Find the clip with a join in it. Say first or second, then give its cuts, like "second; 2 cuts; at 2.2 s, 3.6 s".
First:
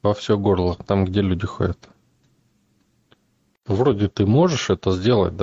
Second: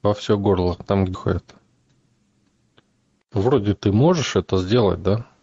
second; 1 cut; at 1.1 s